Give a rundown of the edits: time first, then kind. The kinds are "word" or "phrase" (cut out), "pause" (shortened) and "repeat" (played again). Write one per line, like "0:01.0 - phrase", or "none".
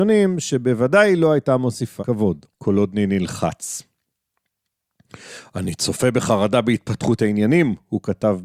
0:02.0 - word
0:02.5 - pause